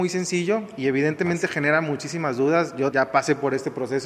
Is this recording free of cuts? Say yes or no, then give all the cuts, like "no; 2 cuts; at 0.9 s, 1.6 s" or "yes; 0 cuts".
no; 1 cut; at 2.9 s